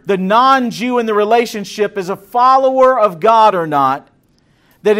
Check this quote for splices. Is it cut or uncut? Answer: uncut